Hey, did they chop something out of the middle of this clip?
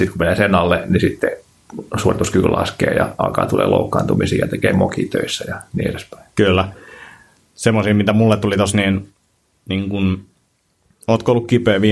no; 0 cuts

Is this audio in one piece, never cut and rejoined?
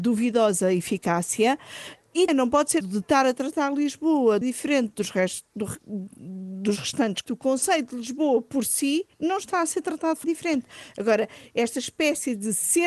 no; 6 cuts; at 2.3 s, 2.8 s, 4.4 s, 7.2 s, 9.1 s, 10.2 s

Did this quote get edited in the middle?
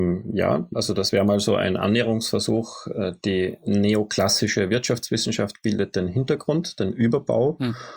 no; 0 cuts

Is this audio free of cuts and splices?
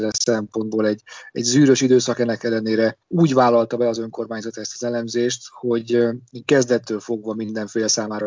no; 1 cut; at 3.0 s

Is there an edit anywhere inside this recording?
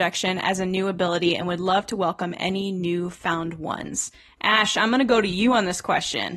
no; 0 cuts

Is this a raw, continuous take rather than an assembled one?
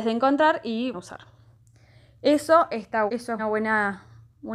no; 3 cuts; at 0.9 s, 3.1 s, 3.4 s

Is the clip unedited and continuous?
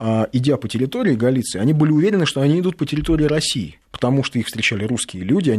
no; 1 cut; at 3.8 s

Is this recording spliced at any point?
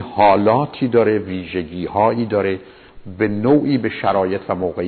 no; 0 cuts

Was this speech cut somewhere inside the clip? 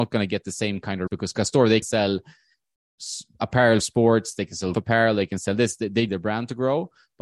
yes; 5 cuts; at 1.1 s, 1.8 s, 3.8 s, 4.7 s, 6.1 s

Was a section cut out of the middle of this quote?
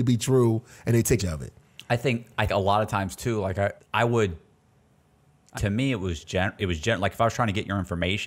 yes; 6 cuts; at 1.2 s, 2.5 s, 3.8 s, 5.5 s, 6.2 s, 6.6 s

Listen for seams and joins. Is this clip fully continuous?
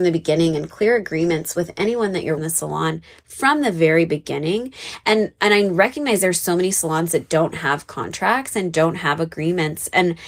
no; 1 cut; at 2.4 s

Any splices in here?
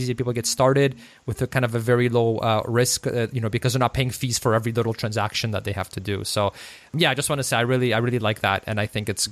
no; 0 cuts

